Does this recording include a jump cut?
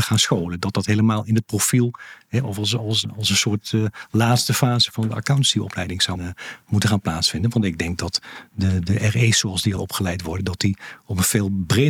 yes; 2 cuts; at 6.2 s, 9.8 s

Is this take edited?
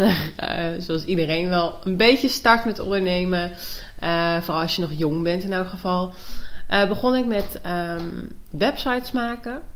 no; 0 cuts

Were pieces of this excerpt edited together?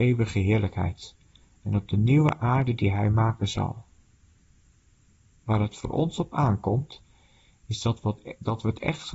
no; 0 cuts

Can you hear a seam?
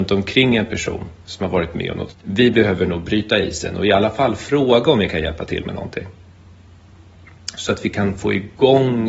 yes; 1 cut; at 2.1 s

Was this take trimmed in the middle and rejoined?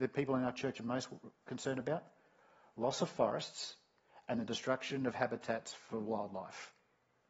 no; 0 cuts

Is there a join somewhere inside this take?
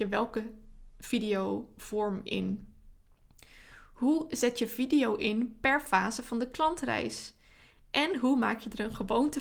no; 0 cuts

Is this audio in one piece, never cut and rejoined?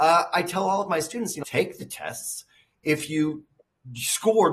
no; 1 cut; at 1.4 s

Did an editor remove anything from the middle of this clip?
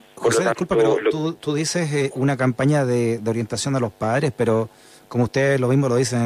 no; 0 cuts

